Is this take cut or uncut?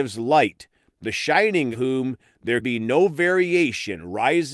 cut